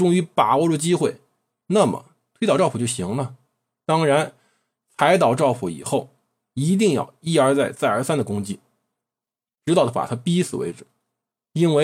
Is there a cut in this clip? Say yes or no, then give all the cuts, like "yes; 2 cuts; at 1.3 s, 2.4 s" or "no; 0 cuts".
no; 0 cuts